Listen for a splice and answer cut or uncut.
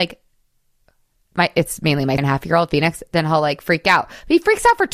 cut